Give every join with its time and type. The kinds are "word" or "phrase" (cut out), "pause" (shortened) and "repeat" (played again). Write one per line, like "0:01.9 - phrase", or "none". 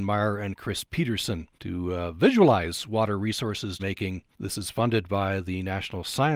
0:01.5 - pause
0:03.8 - word
0:04.3 - pause